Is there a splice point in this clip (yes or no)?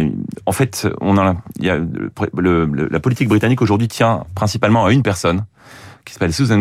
no